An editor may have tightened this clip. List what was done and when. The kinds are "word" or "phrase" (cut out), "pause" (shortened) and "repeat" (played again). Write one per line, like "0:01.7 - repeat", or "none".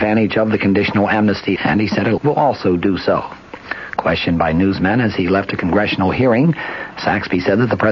0:01.6 - word
0:02.2 - phrase